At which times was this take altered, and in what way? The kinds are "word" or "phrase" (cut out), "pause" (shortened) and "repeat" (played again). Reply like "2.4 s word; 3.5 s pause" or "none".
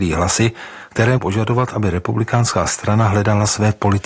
1.2 s word